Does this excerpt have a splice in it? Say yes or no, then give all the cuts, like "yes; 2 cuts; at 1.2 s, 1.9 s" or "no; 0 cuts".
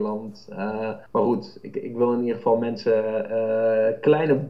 yes; 1 cut; at 1.1 s